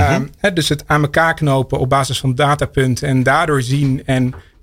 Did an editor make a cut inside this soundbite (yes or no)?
no